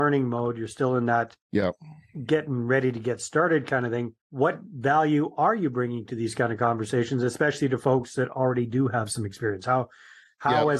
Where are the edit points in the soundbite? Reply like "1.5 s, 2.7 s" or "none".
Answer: 1.4 s, 4.2 s